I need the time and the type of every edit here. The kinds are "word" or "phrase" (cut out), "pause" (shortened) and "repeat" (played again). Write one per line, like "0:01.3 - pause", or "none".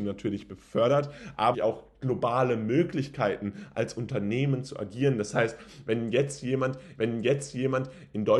0:01.5 - word
0:07.0 - repeat